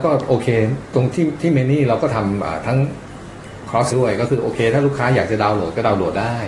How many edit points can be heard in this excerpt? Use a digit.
1